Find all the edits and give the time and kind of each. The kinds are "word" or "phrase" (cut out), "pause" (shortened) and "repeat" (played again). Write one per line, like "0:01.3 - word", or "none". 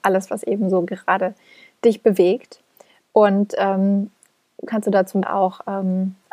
0:04.7 - word
0:05.2 - word